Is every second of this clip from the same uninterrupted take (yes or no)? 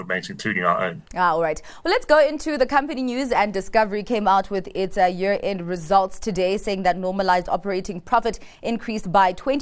no